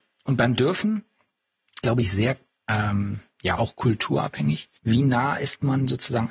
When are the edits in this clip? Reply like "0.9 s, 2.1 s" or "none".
1.8 s, 3.6 s, 4.8 s